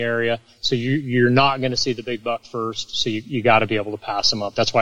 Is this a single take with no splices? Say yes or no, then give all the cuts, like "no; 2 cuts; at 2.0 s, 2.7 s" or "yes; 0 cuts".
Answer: yes; 0 cuts